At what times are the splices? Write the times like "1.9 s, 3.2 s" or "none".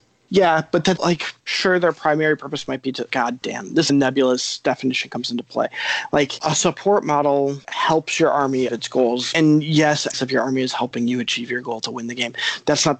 1.0 s, 3.1 s, 3.9 s, 8.7 s, 10.1 s